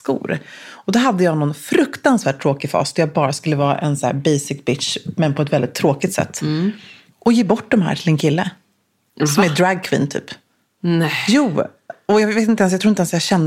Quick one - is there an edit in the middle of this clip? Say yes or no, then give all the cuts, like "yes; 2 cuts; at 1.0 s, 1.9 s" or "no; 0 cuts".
no; 0 cuts